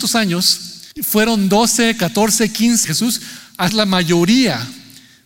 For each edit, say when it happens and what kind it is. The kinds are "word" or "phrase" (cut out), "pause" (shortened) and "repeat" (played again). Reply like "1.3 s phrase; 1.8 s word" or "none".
0.9 s pause; 2.8 s phrase; 3.7 s word

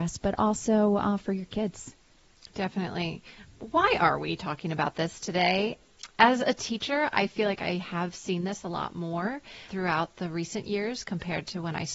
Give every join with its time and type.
none

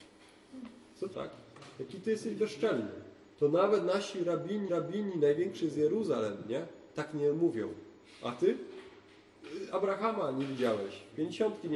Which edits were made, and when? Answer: 1.1 s word; 3.3 s pause; 4.7 s repeat

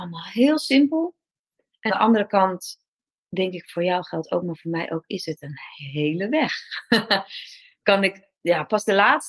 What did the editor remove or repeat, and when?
1.9 s word

